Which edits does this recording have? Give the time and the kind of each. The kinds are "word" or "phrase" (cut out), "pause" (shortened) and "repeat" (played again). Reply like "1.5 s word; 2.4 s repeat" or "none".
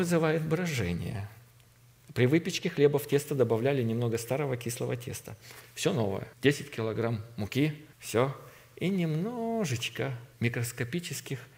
6.3 s pause; 7.9 s pause; 10.3 s pause